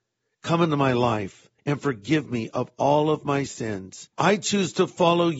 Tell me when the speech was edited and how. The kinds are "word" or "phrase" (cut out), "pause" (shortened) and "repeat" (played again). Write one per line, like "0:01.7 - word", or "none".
0:01.6 - pause
0:04.1 - pause